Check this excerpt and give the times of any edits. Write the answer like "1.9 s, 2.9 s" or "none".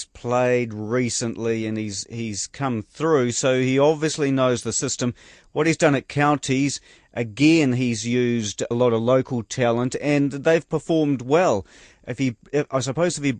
8.7 s